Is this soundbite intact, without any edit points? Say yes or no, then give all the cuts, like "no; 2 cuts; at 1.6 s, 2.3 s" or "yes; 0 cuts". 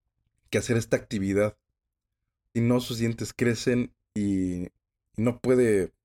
no; 1 cut; at 2.5 s